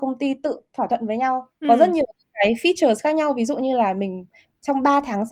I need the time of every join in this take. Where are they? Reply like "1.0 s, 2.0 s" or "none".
1.6 s